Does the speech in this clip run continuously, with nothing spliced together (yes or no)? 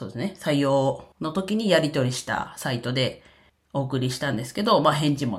no